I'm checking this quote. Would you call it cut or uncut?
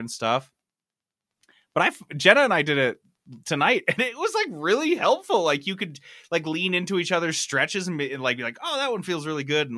uncut